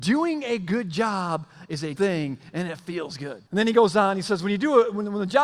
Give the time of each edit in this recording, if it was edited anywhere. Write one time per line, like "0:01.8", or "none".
0:01.9
0:03.5